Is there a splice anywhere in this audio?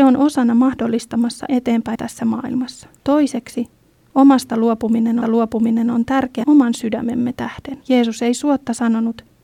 yes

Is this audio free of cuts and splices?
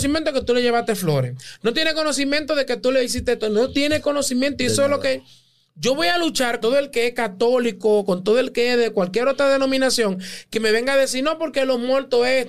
no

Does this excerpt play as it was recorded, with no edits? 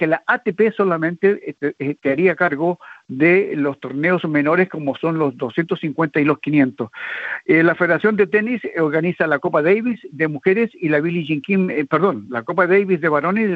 yes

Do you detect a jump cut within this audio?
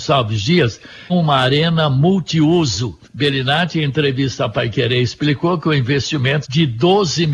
yes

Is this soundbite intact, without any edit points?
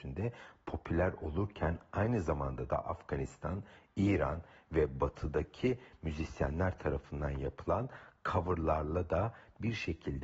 yes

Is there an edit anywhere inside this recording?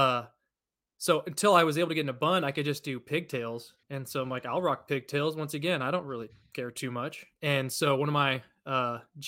yes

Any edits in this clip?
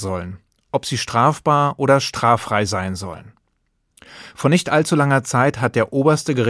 no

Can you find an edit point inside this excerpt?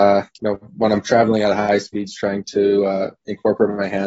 no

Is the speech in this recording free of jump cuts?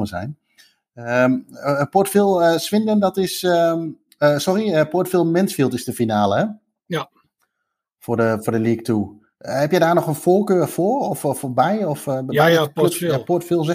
yes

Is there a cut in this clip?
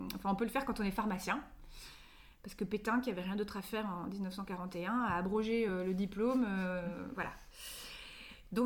no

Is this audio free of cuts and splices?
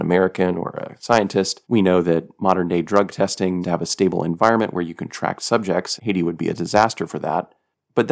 no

